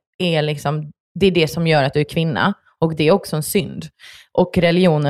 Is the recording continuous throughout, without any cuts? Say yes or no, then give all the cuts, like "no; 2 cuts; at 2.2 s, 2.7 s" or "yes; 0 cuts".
yes; 0 cuts